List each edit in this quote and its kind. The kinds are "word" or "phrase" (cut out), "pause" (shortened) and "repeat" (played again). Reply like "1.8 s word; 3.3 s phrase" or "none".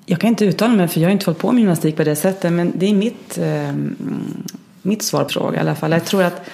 5.3 s word